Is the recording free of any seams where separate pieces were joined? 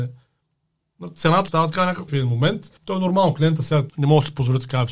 no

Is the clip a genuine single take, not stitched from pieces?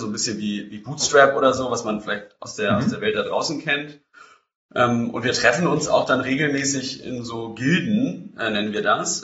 yes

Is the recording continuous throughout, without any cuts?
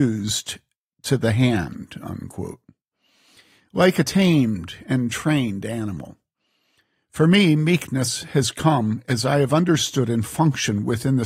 yes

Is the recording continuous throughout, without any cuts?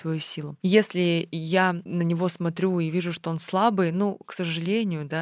yes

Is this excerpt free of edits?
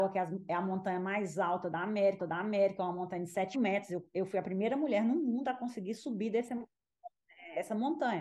no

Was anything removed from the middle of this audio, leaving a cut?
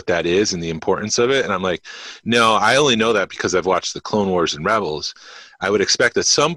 no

